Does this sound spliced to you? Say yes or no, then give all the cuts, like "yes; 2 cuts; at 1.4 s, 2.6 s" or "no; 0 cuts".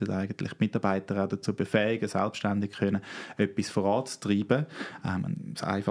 no; 0 cuts